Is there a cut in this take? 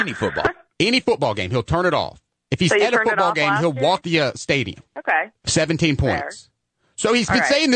yes; 3 cuts; at 2.3 s, 4.0 s, 4.9 s

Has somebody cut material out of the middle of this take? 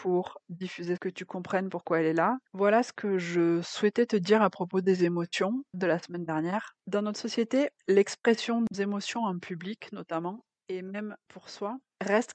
yes; 6 cuts; at 1.0 s, 2.5 s, 5.7 s, 6.8 s, 7.8 s, 8.7 s

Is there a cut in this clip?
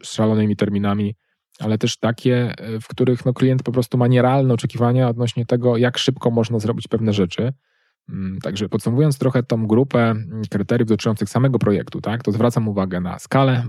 no; 0 cuts

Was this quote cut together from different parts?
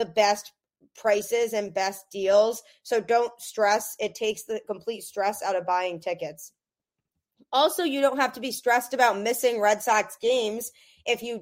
no; 0 cuts

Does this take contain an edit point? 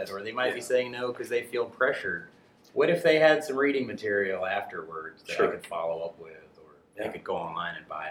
no; 0 cuts

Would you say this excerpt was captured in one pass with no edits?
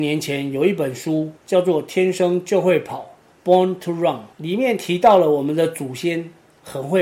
no; 2 cuts; at 1.4 s, 4.3 s

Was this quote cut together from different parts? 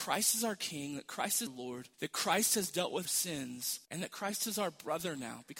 yes; 4 cuts; at 1.5 s, 1.9 s, 3.1 s, 3.8 s

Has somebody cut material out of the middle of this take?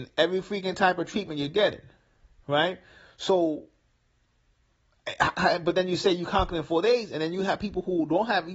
no; 0 cuts

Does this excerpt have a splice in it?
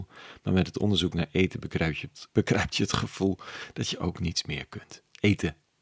yes; 1 cut; at 2.3 s

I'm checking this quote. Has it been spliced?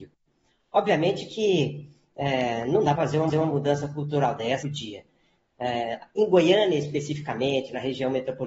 yes; 3 cuts; at 3.0 s, 3.3 s, 4.6 s

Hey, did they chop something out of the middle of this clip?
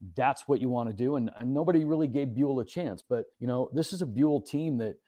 yes; 1 cut; at 3.3 s

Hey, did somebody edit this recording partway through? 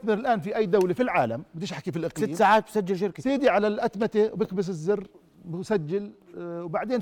no; 0 cuts

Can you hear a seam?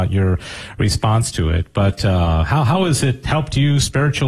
no; 0 cuts

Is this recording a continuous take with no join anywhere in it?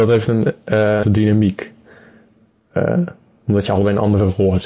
no; 1 cut; at 1.0 s

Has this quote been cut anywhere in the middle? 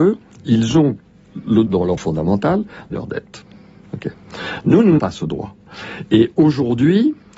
yes; 4 cuts; at 1.7 s, 2.0 s, 2.9 s, 5.0 s

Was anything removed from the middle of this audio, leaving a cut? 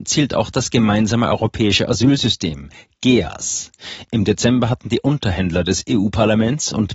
no; 0 cuts

